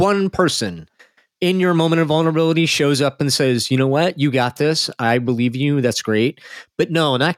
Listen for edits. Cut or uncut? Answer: uncut